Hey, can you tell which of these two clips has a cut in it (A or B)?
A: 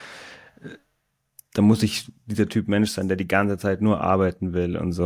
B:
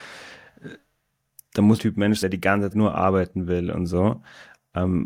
B